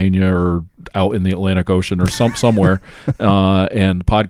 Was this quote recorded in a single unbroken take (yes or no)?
yes